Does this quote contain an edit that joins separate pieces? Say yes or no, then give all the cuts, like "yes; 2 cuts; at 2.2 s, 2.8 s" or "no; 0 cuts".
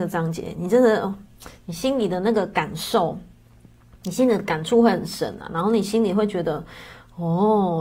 no; 0 cuts